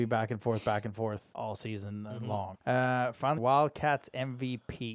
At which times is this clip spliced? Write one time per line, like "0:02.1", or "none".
0:01.3
0:02.5
0:03.4